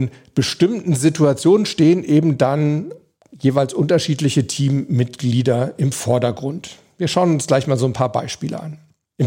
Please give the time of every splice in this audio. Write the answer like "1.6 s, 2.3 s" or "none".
none